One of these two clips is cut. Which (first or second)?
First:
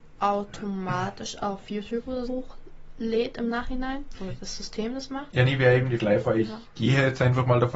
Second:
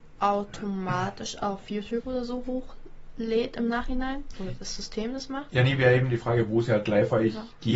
first